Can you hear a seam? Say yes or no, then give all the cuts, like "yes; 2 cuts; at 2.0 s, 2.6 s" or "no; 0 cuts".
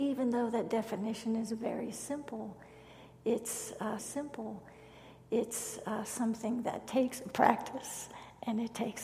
yes; 1 cut; at 4.0 s